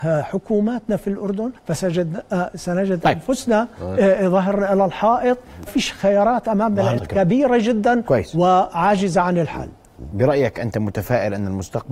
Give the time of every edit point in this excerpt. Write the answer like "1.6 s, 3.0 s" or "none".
1.6 s, 5.7 s, 7.0 s